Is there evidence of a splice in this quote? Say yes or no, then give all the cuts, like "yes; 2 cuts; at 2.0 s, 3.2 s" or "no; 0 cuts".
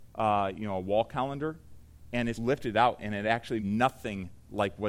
yes; 2 cuts; at 2.3 s, 3.6 s